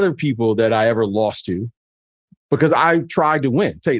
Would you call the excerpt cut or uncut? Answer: uncut